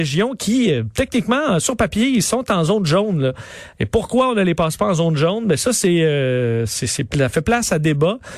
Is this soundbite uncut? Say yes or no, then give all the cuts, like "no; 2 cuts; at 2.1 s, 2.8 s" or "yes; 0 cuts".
yes; 0 cuts